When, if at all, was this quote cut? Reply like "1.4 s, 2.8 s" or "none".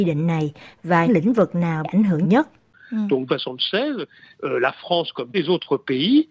1.1 s, 1.8 s, 2.2 s, 3.3 s, 4.3 s, 5.3 s